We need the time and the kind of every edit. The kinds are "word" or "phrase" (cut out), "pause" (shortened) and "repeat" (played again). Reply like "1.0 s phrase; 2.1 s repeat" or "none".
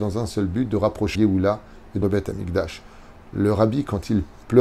1.1 s word; 2.0 s word